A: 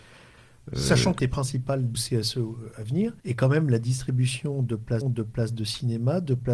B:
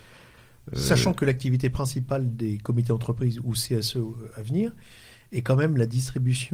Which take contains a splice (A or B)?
A